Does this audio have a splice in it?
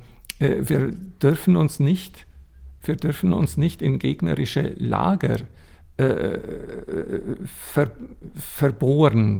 no; 0 cuts

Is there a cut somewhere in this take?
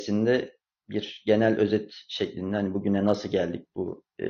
no; 0 cuts

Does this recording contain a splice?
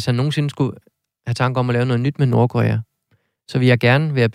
no; 0 cuts

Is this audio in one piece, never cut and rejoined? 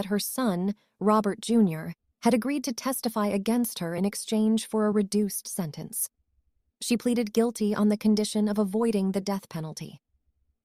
yes; 0 cuts

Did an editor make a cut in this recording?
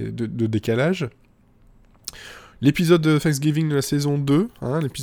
no; 0 cuts

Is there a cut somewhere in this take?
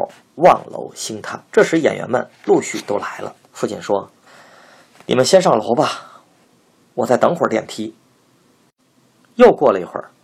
yes; 3 cuts; at 1.5 s, 3.4 s, 4.3 s

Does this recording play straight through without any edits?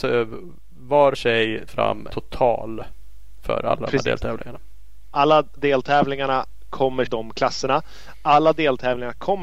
no; 5 cuts; at 1.1 s, 1.7 s, 2.1 s, 5.6 s, 7.1 s

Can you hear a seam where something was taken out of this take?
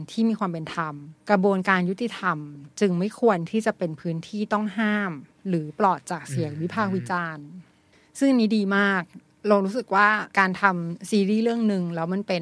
yes; 2 cuts; at 1.2 s, 10.3 s

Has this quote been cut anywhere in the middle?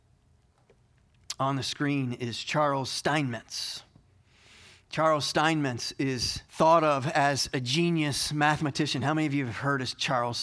yes; 1 cut; at 6.5 s

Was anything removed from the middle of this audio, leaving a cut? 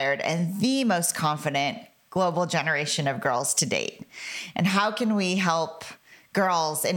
no; 0 cuts

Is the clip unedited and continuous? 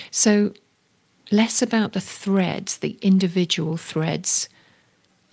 yes; 0 cuts

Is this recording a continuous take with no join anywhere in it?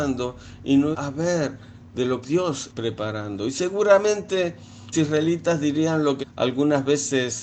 no; 5 cuts; at 0.9 s, 2.2 s, 2.7 s, 4.9 s, 6.2 s

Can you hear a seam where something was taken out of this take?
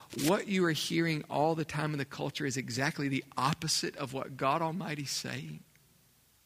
no; 0 cuts

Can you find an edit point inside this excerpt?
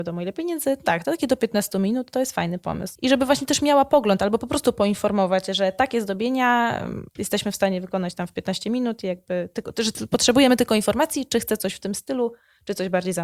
no; 0 cuts

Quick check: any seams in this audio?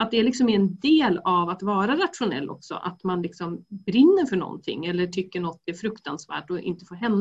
no; 0 cuts

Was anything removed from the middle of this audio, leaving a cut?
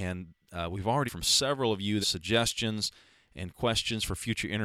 yes; 2 cuts; at 1.1 s, 2.0 s

